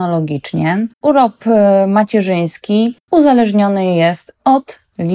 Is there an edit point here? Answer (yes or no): yes